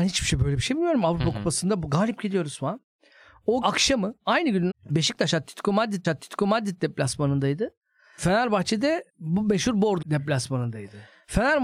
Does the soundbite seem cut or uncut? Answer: cut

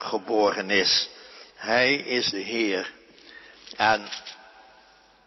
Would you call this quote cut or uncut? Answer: cut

